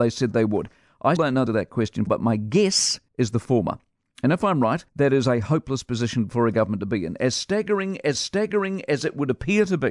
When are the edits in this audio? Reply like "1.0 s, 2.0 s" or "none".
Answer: 1.2 s, 1.5 s, 2.1 s, 3.1 s, 4.9 s, 8.1 s